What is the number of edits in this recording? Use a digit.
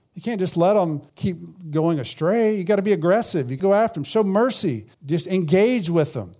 3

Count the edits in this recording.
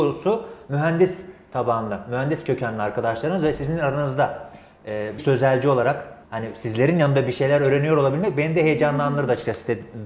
2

